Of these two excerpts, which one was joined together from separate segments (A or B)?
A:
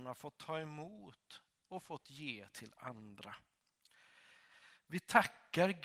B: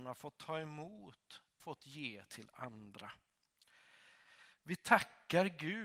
B